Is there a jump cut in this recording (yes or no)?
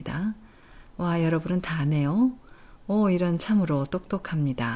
no